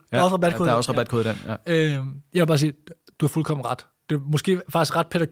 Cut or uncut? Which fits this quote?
uncut